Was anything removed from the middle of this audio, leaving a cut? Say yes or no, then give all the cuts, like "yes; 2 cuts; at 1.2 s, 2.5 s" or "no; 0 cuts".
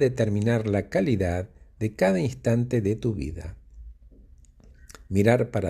no; 0 cuts